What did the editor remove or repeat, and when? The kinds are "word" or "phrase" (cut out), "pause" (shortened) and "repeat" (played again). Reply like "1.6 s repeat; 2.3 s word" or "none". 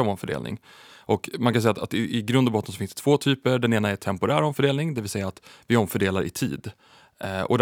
none